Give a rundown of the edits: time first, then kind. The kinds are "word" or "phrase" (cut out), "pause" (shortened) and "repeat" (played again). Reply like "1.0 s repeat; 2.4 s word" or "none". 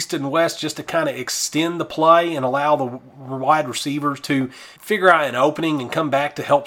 4.8 s pause